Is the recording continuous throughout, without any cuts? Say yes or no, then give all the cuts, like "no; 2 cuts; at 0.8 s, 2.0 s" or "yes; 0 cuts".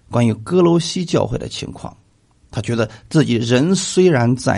no; 1 cut; at 2.3 s